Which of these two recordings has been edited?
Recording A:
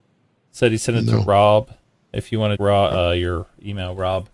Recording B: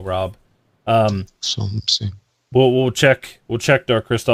A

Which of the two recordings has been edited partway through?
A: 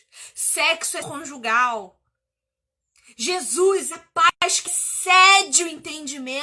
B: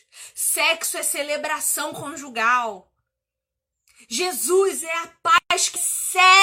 A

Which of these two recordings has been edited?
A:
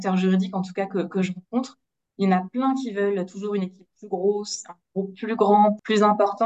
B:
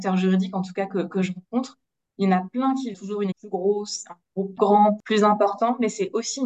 B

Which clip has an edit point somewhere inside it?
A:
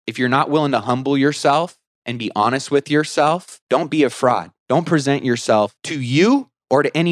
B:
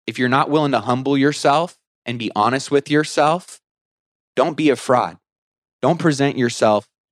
A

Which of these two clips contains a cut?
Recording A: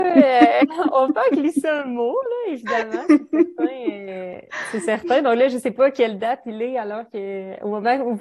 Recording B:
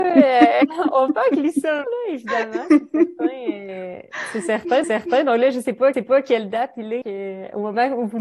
B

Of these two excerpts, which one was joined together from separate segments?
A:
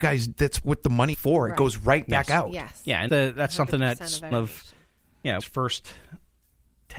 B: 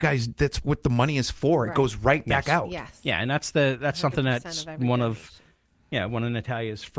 A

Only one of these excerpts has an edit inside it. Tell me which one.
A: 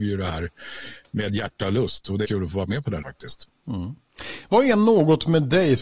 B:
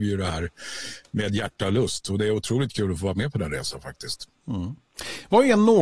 A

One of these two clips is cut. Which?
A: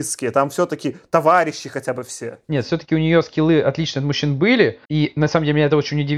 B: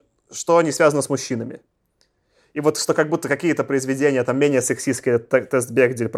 A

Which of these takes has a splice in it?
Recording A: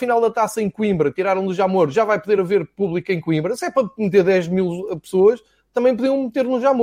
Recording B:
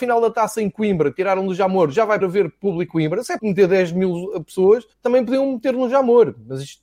B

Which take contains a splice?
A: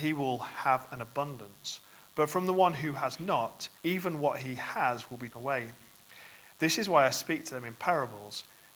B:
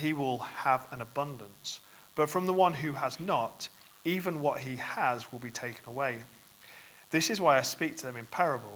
A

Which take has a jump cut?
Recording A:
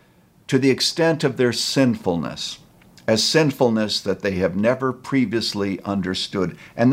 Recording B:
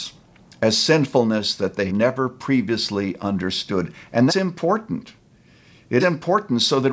B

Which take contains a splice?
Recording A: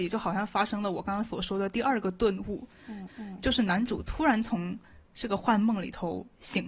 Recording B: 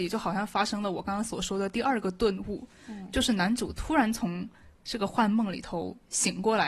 A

